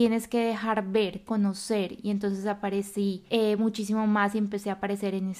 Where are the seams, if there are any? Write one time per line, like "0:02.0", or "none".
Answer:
0:01.3
0:03.3